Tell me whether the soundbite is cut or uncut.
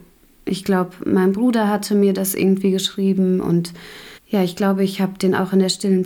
cut